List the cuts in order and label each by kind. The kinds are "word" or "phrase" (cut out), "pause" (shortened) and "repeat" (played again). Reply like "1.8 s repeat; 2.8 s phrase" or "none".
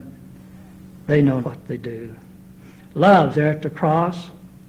1.4 s word; 3.3 s word